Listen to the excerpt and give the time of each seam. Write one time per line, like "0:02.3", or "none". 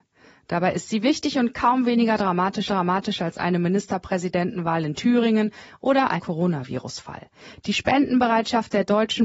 0:02.7
0:06.2